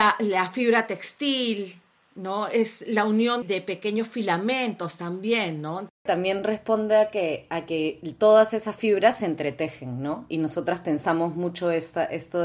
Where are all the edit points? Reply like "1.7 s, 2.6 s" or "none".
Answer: 3.4 s